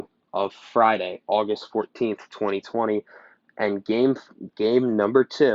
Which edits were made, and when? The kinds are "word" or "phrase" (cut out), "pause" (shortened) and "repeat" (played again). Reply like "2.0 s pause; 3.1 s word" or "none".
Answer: none